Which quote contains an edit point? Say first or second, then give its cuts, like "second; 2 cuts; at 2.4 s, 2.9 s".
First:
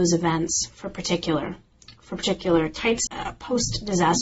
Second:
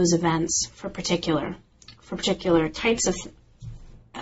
first; 1 cut; at 3.1 s